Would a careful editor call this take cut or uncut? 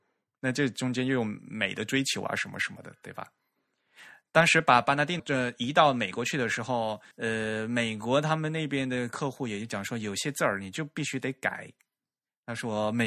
cut